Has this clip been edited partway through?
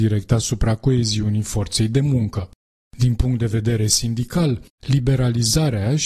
no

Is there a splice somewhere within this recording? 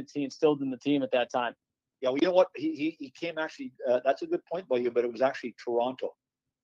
no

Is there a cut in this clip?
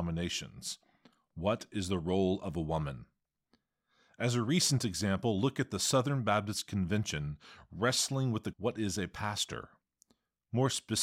yes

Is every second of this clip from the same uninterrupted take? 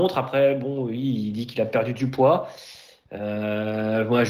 yes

